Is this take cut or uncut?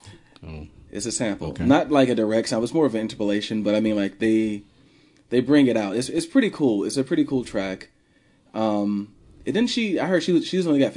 uncut